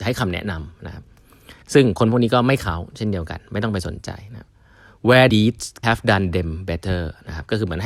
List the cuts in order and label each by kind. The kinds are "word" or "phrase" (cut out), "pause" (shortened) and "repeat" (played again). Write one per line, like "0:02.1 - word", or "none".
0:01.6 - pause
0:05.3 - phrase
0:05.8 - word